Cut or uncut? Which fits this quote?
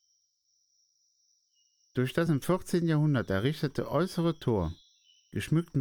uncut